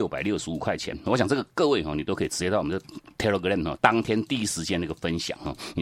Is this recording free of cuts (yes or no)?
no